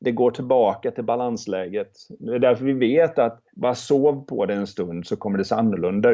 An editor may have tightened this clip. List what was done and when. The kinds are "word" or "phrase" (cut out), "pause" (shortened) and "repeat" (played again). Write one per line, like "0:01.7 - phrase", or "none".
0:03.5 - pause